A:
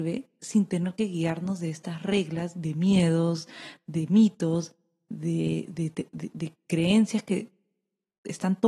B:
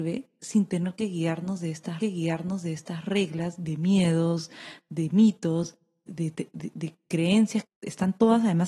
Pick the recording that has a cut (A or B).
B